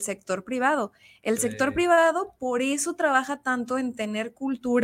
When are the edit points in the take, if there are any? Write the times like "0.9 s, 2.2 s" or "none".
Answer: none